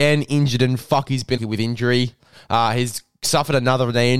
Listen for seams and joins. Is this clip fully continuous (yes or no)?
no